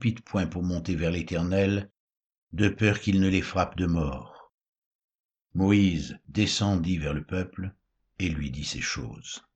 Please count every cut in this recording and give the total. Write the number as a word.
zero